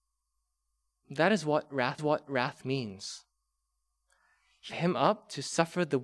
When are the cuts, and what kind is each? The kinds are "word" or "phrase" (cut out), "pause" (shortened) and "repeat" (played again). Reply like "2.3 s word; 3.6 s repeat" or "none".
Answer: 2.0 s repeat; 4.7 s word